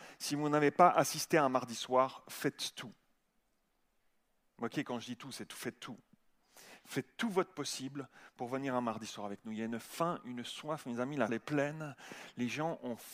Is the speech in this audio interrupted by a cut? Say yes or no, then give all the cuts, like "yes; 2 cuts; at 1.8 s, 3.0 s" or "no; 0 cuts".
yes; 1 cut; at 11.3 s